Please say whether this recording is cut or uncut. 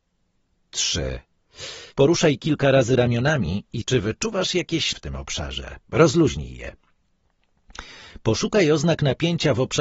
cut